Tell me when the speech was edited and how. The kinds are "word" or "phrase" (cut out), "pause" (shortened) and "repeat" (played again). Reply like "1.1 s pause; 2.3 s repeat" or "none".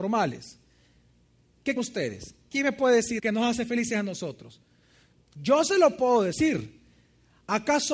1.8 s word; 3.2 s word

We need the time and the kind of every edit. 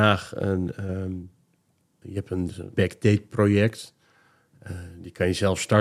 2.0 s word; 2.7 s word

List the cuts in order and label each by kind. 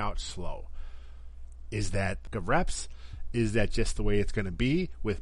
2.3 s word

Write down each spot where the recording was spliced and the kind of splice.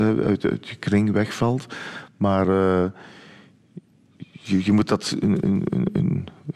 5.2 s word

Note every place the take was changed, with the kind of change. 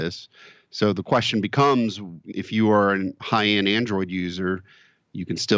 2.3 s word; 3.2 s word

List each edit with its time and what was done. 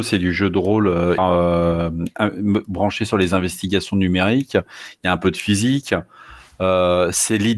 1.2 s word

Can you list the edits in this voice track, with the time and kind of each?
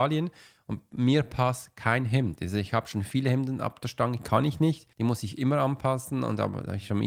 4.9 s pause

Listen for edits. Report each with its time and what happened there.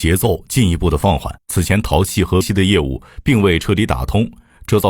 1.4 s pause; 2.4 s word

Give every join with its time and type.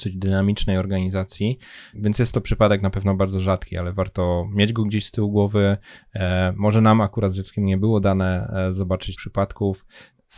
9.2 s word

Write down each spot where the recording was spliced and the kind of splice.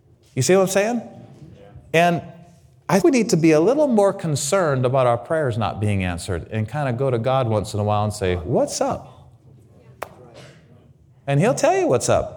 3.0 s word

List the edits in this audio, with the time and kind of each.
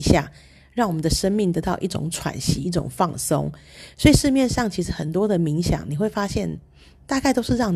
none

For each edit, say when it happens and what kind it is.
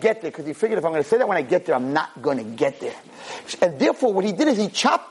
none

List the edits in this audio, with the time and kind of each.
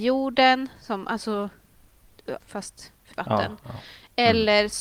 2.4 s word; 3.1 s word

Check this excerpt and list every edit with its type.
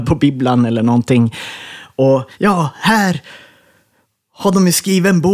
2.3 s phrase

